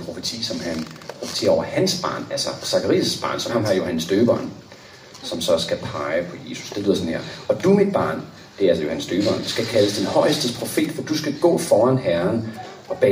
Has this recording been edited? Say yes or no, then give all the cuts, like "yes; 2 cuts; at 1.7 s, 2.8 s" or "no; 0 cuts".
yes; 1 cut; at 3.5 s